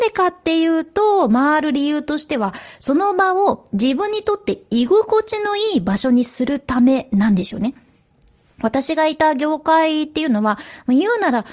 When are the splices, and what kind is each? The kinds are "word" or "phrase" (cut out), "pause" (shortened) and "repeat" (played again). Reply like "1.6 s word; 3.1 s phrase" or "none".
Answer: none